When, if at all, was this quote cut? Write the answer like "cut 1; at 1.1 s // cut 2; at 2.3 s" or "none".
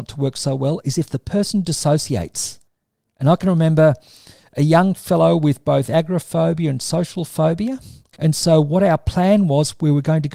none

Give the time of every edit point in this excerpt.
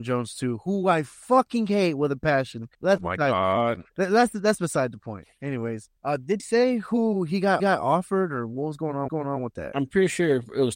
cut 1; at 2.7 s // cut 2; at 3.9 s // cut 3; at 6.0 s // cut 4; at 6.4 s // cut 5; at 7.6 s // cut 6; at 9.1 s

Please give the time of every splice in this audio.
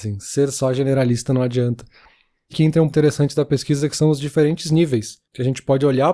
cut 1; at 2.5 s // cut 2; at 2.9 s

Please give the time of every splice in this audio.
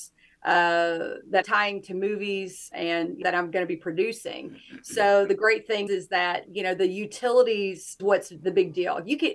cut 1; at 1.4 s // cut 2; at 2.7 s // cut 3; at 3.2 s // cut 4; at 5.9 s // cut 5; at 8.0 s

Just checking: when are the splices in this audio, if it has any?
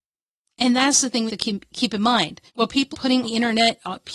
cut 1; at 1.3 s // cut 2; at 2.5 s // cut 3; at 2.9 s // cut 4; at 3.2 s

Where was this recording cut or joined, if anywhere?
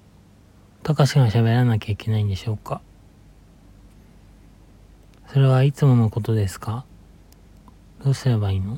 none

